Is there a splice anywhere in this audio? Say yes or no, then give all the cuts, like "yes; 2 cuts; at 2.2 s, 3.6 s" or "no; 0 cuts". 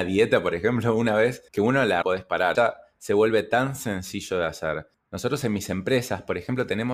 yes; 3 cuts; at 1.5 s, 2.0 s, 2.5 s